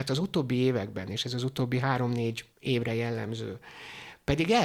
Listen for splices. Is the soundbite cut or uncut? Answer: cut